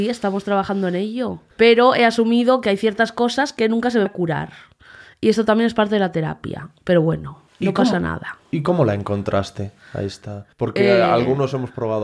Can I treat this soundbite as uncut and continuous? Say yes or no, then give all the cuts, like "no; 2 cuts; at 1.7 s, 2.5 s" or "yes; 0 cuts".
no; 4 cuts; at 1.5 s, 4.1 s, 7.5 s, 10.5 s